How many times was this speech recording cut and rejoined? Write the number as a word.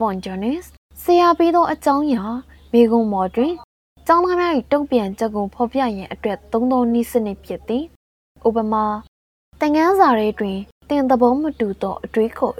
zero